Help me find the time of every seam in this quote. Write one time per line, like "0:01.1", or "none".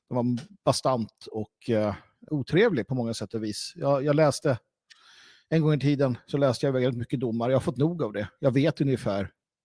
0:02.3